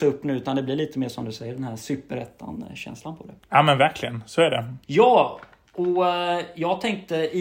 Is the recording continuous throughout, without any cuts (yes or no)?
no